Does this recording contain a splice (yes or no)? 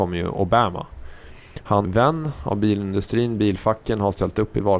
yes